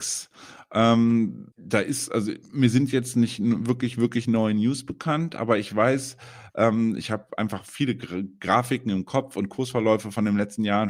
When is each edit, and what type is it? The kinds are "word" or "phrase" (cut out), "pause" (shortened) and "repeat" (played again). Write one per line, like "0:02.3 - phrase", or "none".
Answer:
0:01.5 - pause